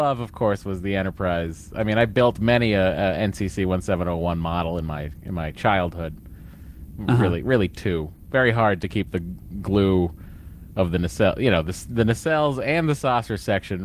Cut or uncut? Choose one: uncut